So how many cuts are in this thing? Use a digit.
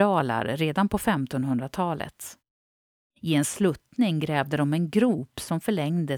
0